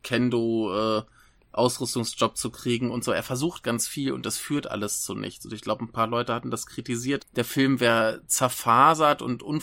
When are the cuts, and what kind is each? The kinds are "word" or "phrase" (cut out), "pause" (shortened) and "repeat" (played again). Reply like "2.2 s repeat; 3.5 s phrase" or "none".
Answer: 3.6 s word; 7.2 s word